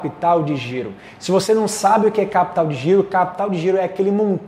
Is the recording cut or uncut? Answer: uncut